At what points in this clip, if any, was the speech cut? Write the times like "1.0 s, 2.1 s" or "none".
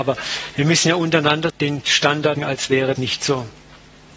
1.5 s, 2.4 s, 3.0 s